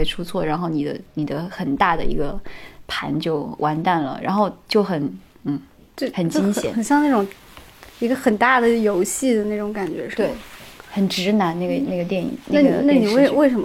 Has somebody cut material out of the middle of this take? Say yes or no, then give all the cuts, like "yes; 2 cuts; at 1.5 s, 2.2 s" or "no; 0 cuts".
no; 0 cuts